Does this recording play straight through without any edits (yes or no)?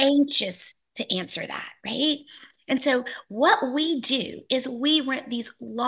yes